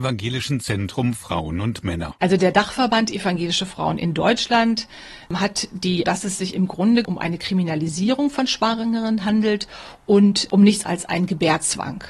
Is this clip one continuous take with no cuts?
no; 3 cuts; at 6.0 s, 7.0 s, 10.8 s

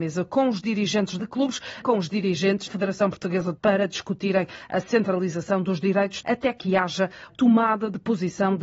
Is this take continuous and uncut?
no; 6 cuts; at 1.2 s, 1.8 s, 2.7 s, 3.6 s, 6.2 s, 7.3 s

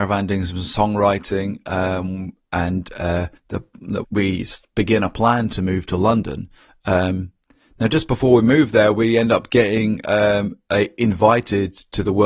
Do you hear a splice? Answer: yes; 2 cuts; at 3.4 s, 4.0 s

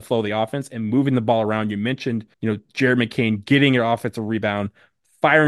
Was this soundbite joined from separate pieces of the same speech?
yes; 1 cut; at 2.3 s

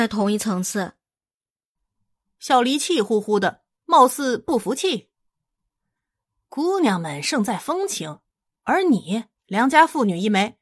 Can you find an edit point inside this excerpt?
no; 0 cuts

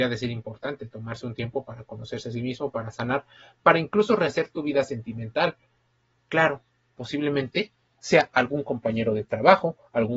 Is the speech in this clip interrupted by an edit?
no; 0 cuts

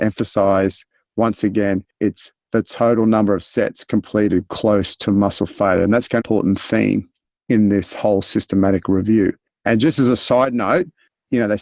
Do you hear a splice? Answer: yes; 1 cut; at 6.2 s

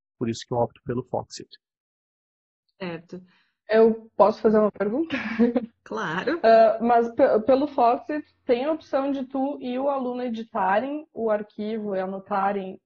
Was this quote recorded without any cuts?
yes; 0 cuts

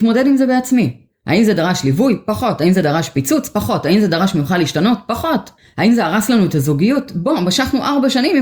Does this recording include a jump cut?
no; 0 cuts

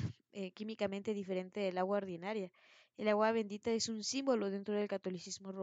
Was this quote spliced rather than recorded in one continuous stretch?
no; 0 cuts

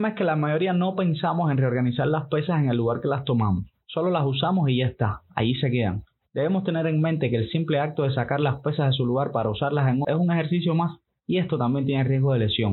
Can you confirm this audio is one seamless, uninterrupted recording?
no; 1 cut; at 10.0 s

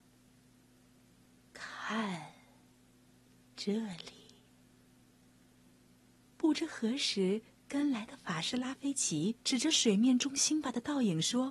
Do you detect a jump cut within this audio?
yes; 1 cut; at 9.4 s

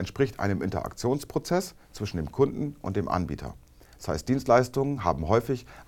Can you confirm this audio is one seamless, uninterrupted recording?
yes; 0 cuts

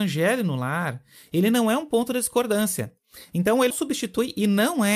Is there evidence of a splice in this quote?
yes; 1 cut; at 3.7 s

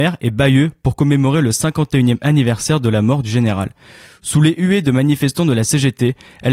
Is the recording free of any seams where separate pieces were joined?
yes; 0 cuts

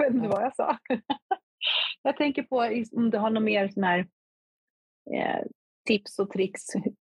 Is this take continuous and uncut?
yes; 0 cuts

